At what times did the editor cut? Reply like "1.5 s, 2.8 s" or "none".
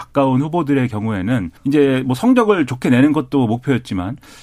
1.6 s